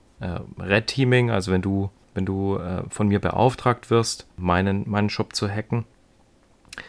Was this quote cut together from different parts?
yes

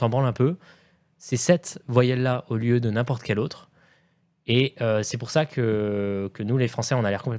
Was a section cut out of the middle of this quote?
no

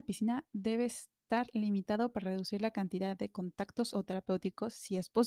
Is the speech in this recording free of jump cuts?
no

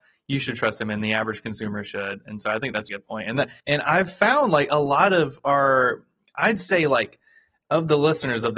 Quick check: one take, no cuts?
no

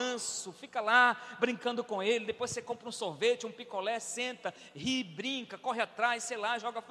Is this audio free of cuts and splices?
yes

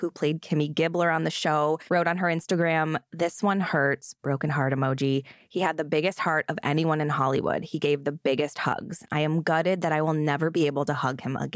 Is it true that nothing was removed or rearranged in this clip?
no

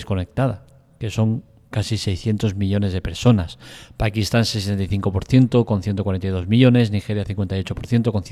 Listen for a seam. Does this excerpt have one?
no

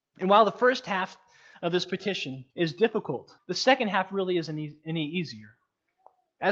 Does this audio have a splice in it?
yes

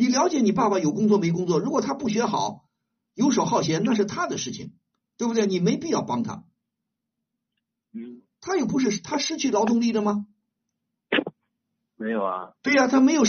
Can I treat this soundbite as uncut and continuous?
yes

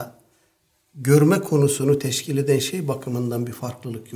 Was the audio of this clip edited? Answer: no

